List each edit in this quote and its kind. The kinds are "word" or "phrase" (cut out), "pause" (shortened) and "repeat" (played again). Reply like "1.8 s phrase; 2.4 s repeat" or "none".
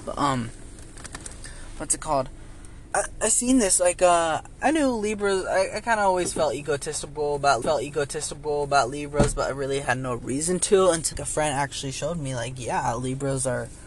2.9 s word; 7.6 s repeat; 11.1 s word